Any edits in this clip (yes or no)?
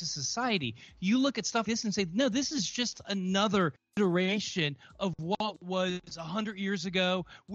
yes